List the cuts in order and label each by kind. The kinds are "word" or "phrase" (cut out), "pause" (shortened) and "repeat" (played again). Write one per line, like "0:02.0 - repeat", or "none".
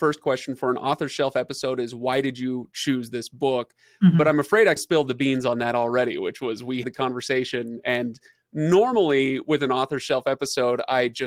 0:04.8 - word
0:06.8 - word

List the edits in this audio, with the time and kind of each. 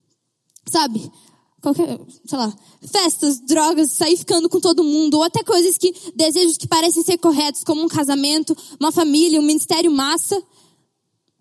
none

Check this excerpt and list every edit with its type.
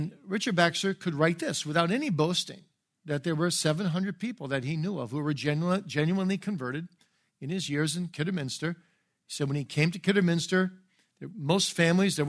none

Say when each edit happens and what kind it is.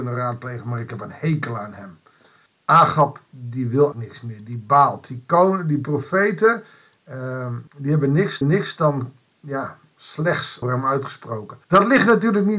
0:02.5 - pause
0:03.9 - word
0:07.7 - pause
0:08.4 - repeat
0:10.6 - word
0:11.6 - pause

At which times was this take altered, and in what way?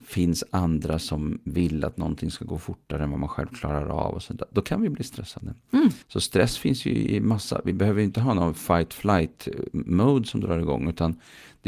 0:06.0 - pause

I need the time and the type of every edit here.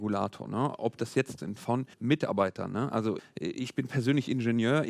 0:01.4 - phrase
0:01.9 - pause
0:03.2 - word

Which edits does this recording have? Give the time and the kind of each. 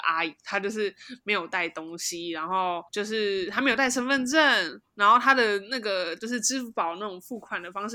0:02.9 - pause

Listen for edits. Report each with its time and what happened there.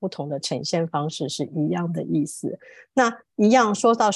none

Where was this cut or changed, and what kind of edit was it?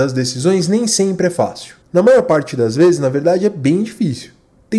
0:01.8 - pause

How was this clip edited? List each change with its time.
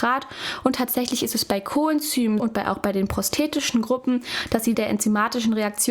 0:02.4 - word
0:04.7 - word

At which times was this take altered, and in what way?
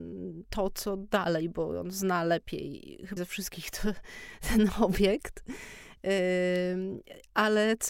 0:03.2 - word

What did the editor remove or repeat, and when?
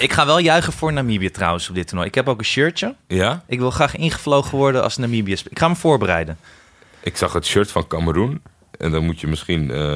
none

